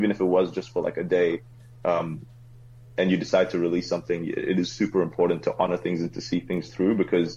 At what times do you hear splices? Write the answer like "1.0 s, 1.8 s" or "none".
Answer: none